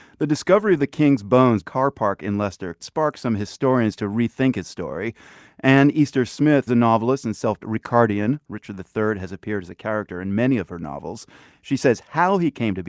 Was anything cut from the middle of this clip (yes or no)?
yes